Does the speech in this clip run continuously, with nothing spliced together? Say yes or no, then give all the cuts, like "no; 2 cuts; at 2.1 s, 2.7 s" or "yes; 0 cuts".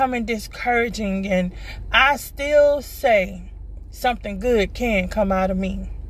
yes; 0 cuts